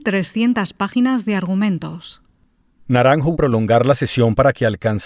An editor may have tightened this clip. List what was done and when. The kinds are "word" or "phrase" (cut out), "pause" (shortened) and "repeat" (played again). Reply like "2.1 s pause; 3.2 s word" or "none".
3.3 s word